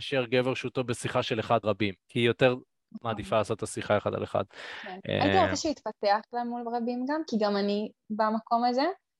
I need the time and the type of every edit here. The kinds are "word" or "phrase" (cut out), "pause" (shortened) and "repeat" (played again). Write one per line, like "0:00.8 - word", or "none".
0:01.6 - word
0:02.0 - pause